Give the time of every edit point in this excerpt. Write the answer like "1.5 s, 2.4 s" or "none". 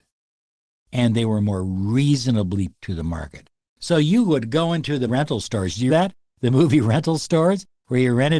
2.7 s, 5.1 s, 5.9 s